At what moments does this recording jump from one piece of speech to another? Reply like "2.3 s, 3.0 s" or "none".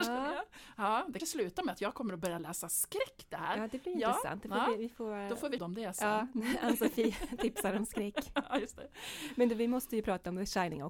1.2 s, 5.6 s